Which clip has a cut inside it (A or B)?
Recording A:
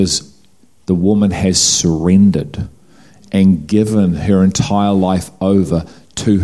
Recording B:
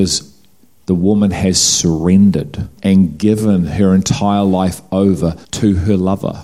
B